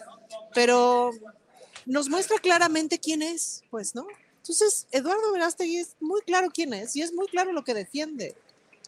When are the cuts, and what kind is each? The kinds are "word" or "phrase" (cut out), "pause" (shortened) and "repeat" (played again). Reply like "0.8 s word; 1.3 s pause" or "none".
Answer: none